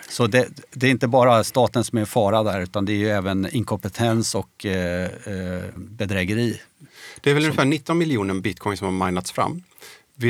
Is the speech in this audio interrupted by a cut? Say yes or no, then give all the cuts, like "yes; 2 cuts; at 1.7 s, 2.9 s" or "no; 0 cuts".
yes; 1 cut; at 5.8 s